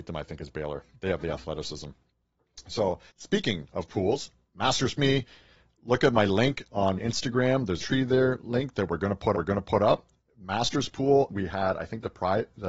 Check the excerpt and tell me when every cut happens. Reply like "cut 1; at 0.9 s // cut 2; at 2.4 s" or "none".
cut 1; at 3.1 s // cut 2; at 5.0 s // cut 3; at 7.0 s // cut 4; at 7.8 s // cut 5; at 9.3 s // cut 6; at 11.3 s